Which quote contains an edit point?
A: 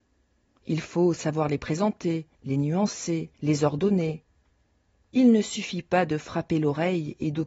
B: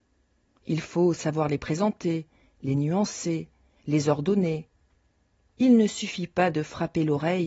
A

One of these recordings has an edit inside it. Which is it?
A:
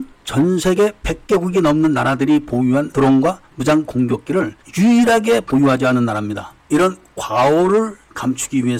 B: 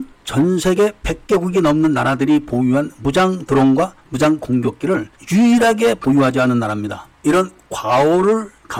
A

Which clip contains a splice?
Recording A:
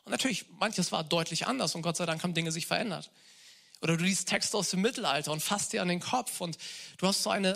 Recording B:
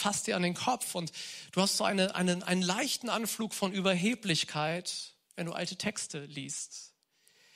B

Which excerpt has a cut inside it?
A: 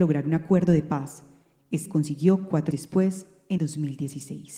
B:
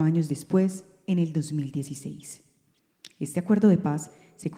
A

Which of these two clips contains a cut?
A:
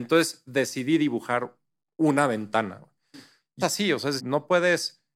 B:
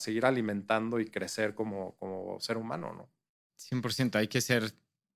A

